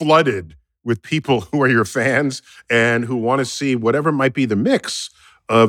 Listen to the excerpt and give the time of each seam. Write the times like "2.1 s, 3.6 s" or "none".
none

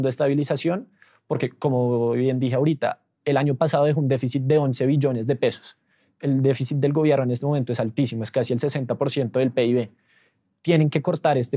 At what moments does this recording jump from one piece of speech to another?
none

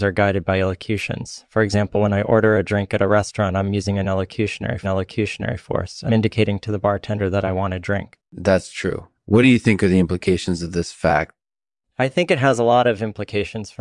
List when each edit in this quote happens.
4.8 s, 6.1 s, 8.2 s

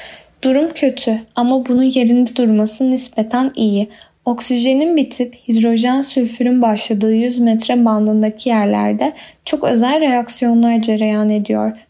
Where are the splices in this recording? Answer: none

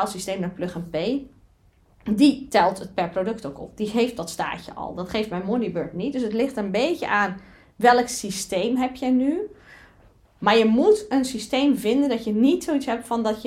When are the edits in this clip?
none

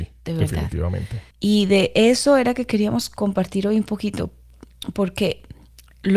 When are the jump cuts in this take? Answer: 1.3 s

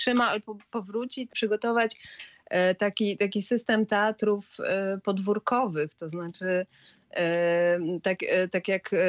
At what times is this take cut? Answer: 1.3 s

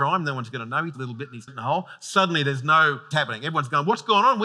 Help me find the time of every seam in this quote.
0.9 s, 1.5 s, 3.1 s

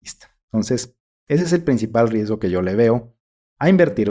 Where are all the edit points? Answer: none

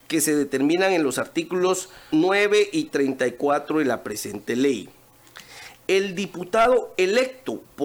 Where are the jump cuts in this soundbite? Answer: 2.1 s

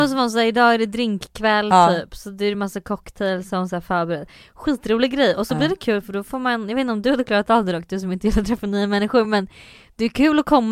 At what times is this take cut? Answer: none

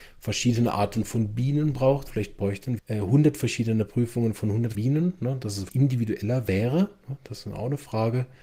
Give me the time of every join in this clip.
2.1 s, 2.8 s, 4.7 s, 5.7 s

